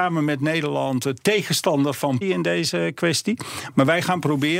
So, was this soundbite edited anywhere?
yes; 1 cut; at 2.2 s

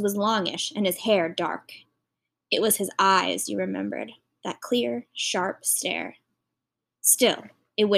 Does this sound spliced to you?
no; 0 cuts

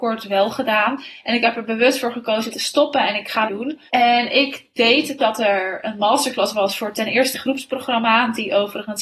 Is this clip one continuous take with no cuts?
no; 5 cuts; at 2.5 s, 3.5 s, 3.9 s, 5.2 s, 7.3 s

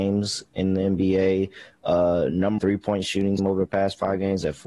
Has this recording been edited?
yes; 2 cuts; at 2.6 s, 3.4 s

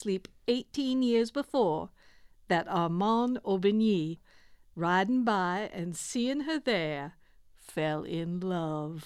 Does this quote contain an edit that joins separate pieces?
no; 0 cuts

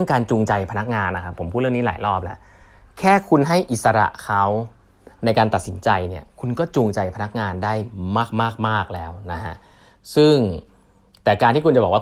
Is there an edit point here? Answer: no; 0 cuts

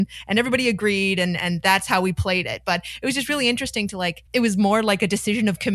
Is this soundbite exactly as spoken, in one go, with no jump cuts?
no; 1 cut; at 4.3 s

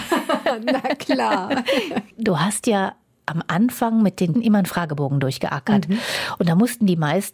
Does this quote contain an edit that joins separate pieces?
yes; 1 cut; at 4.3 s

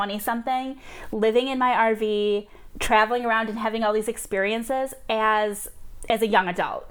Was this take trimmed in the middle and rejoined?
no; 0 cuts

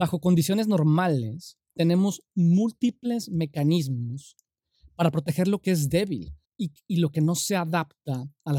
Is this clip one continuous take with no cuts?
no; 1 cut; at 6.4 s

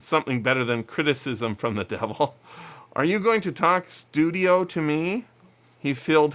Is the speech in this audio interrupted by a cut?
no; 0 cuts

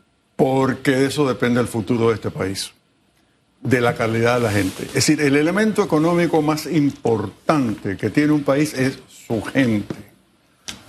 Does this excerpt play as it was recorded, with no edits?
yes; 0 cuts

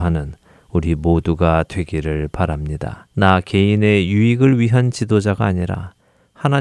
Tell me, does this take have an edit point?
yes; 1 cut; at 3.1 s

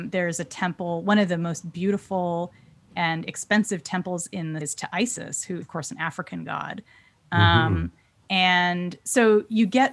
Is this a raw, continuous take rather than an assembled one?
no; 2 cuts; at 4.6 s, 5.6 s

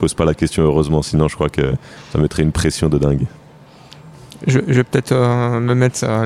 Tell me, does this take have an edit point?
no; 0 cuts

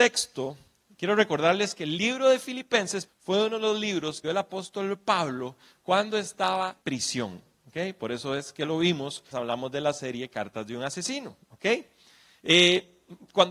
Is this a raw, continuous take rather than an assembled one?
no; 4 cuts; at 3.1 s, 4.2 s, 6.8 s, 9.3 s

